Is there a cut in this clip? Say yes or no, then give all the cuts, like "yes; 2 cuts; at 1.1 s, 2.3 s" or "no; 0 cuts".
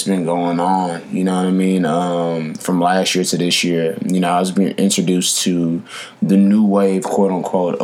no; 0 cuts